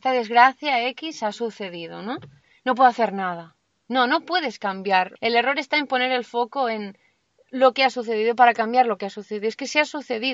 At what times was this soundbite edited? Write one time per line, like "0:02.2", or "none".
0:05.2